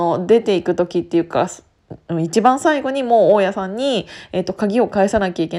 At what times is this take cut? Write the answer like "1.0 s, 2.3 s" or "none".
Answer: none

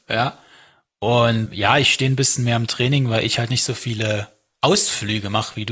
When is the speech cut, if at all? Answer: 1.5 s

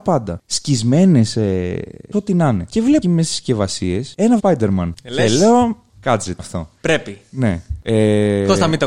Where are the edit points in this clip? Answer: 2.1 s, 3.0 s, 4.4 s, 5.9 s, 6.4 s

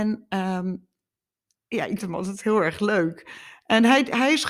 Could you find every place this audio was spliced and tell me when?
1.5 s, 2.0 s

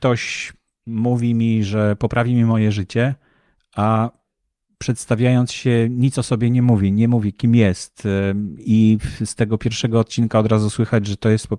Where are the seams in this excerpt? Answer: none

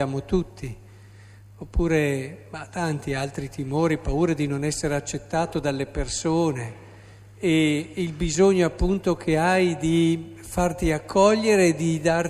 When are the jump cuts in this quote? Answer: 5.5 s

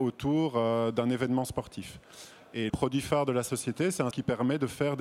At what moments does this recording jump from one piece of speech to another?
2.7 s, 4.1 s

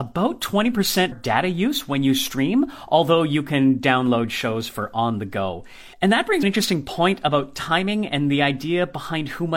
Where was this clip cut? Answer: 1.1 s, 5.9 s, 6.4 s

